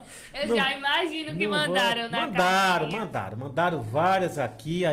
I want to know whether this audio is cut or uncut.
uncut